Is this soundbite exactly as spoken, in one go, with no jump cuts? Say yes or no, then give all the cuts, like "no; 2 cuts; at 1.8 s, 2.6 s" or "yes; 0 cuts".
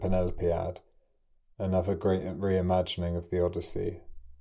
yes; 0 cuts